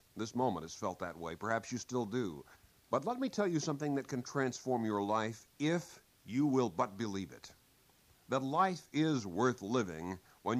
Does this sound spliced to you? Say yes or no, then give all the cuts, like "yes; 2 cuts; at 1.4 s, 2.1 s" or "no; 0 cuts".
yes; 1 cut; at 2.5 s